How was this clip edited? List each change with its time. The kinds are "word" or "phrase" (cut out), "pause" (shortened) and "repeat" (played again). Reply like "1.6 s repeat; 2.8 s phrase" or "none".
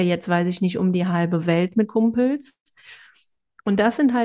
1.9 s word